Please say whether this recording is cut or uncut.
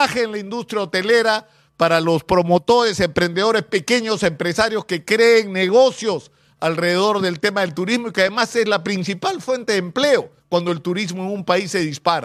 cut